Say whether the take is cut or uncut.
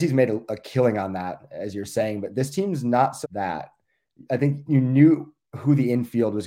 cut